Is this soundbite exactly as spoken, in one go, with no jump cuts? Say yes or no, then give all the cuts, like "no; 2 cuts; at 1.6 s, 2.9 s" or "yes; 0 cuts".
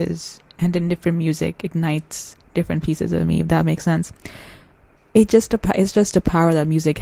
yes; 0 cuts